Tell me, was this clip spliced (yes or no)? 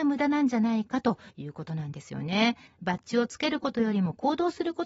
yes